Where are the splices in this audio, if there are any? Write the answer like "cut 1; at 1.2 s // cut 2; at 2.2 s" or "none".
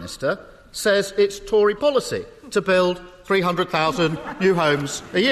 cut 1; at 1.8 s